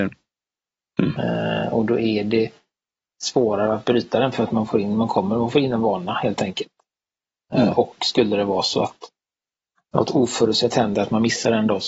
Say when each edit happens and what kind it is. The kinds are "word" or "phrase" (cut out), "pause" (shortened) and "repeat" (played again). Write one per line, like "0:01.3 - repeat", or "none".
none